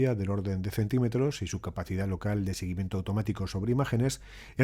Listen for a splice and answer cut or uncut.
uncut